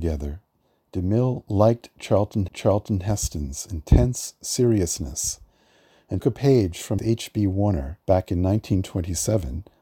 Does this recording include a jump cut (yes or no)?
yes